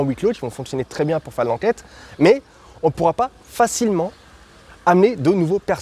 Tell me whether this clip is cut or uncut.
uncut